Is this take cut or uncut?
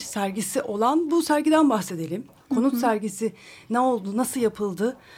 uncut